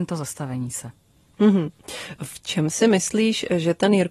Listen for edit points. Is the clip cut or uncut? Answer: uncut